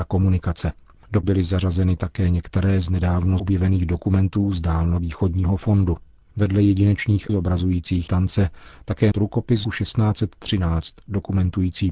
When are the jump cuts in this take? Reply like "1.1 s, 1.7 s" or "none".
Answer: 1.2 s, 3.4 s, 7.3 s, 8.1 s, 9.1 s, 9.6 s

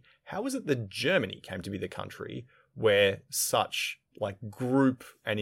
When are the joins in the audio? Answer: 4.1 s

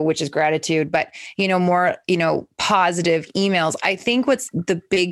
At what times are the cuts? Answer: none

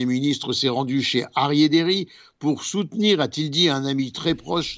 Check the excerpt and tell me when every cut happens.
none

